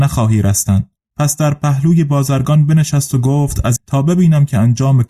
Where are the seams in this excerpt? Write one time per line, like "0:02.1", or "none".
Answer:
0:01.0
0:03.8